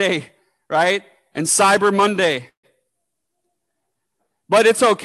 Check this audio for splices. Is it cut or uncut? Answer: uncut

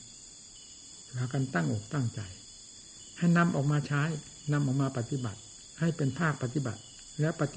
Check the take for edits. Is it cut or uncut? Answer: cut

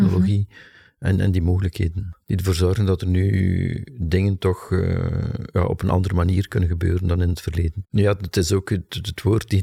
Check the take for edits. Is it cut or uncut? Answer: uncut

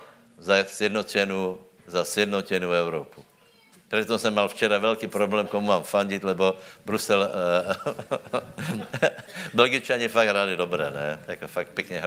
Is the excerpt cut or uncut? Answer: cut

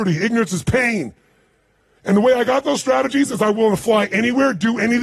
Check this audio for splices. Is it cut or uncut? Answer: uncut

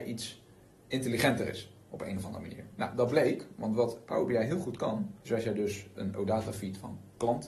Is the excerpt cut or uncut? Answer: cut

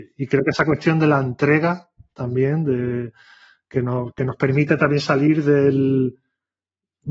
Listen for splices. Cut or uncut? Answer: uncut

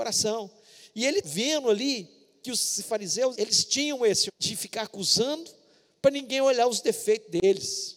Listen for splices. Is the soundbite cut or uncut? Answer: cut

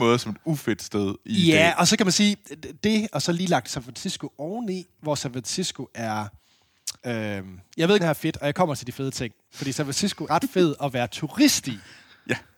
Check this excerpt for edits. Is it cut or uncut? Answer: cut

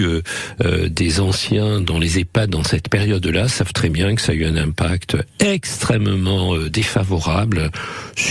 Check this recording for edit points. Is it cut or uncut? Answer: uncut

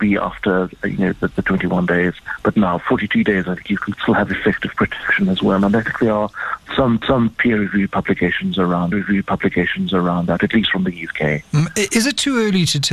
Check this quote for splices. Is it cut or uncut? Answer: cut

